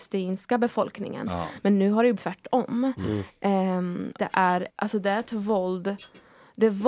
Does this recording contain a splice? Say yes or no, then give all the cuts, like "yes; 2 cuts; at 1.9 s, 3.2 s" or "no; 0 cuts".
yes; 3 cuts; at 2.2 s, 4.2 s, 4.7 s